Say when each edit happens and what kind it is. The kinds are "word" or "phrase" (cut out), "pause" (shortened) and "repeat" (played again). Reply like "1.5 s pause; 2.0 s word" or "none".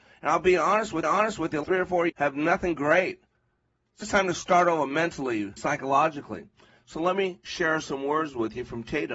1.0 s repeat; 1.6 s word; 2.1 s word; 4.0 s word; 5.6 s word